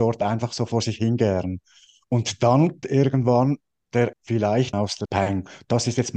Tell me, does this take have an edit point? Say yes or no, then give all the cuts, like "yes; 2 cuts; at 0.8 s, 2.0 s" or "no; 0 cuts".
yes; 4 cuts; at 2.8 s, 4.1 s, 4.7 s, 5.1 s